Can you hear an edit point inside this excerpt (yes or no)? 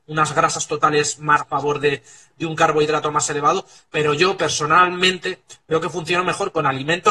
yes